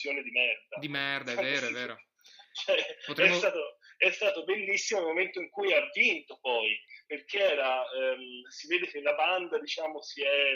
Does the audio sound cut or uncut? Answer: cut